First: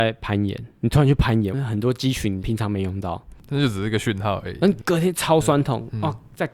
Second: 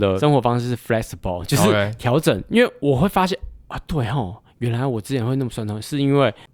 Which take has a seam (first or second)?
first